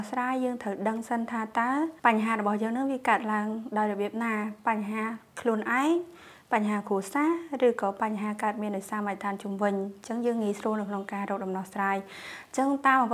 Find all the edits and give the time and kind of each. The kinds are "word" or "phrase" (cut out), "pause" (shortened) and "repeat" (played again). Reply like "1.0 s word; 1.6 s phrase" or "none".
2.0 s pause